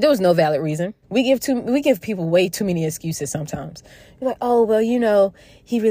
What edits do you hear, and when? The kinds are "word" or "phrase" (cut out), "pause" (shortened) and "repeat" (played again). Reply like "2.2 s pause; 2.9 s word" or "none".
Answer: 1.0 s pause

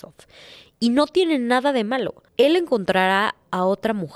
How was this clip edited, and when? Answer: 2.3 s pause

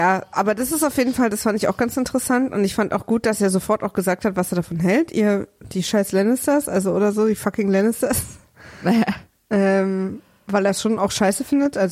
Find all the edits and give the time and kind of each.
none

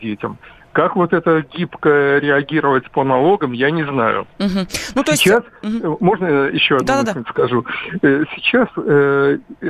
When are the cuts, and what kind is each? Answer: 4.3 s pause

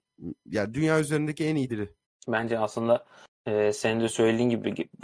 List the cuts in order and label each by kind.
1.7 s word

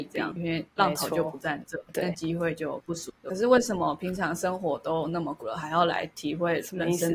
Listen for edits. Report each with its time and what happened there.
3.2 s pause

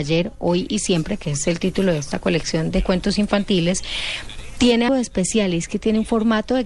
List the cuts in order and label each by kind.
2.7 s word; 4.9 s word

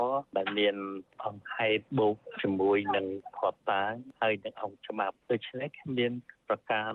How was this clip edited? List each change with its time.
1.9 s pause; 5.2 s pause

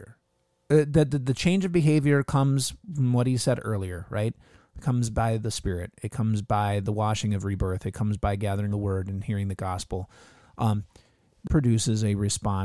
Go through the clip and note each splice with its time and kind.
8.7 s word; 11.5 s word

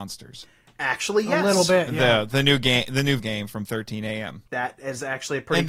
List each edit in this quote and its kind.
3.2 s word; 4.5 s pause

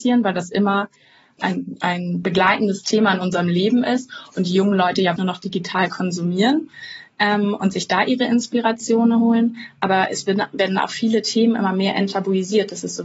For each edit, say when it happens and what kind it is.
1.4 s word; 5.2 s word

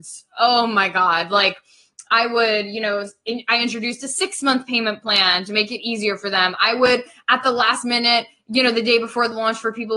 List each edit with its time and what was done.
2.1 s word

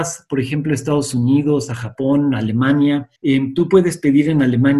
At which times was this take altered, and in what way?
3.2 s pause

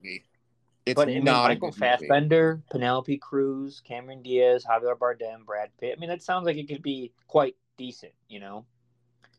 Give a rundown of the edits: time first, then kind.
7.2 s pause

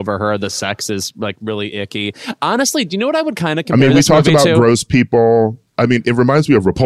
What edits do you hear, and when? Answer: none

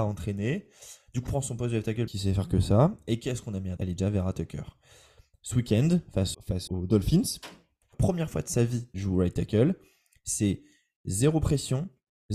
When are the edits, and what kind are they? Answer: 1.3 s word; 2.1 s word; 3.8 s word; 6.3 s word; 6.7 s word; 7.9 s word; 8.9 s word

